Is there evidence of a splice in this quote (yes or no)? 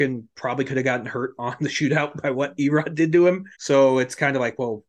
yes